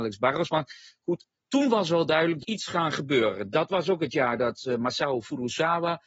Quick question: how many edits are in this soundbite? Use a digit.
1